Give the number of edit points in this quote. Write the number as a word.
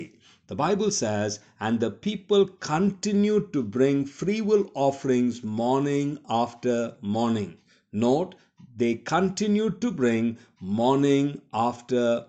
zero